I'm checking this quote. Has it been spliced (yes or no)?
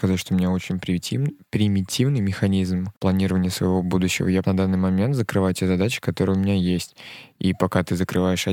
yes